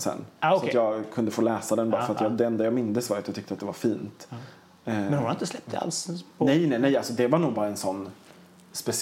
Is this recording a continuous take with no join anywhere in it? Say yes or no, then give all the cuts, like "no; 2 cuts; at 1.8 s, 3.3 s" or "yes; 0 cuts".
yes; 0 cuts